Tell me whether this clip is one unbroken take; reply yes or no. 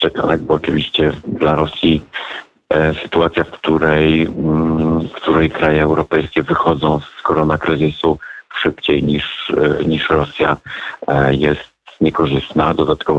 yes